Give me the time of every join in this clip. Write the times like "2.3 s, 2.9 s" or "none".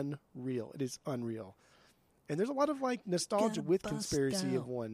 none